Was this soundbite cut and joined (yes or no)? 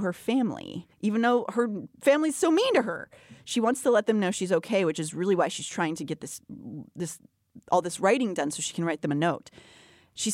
yes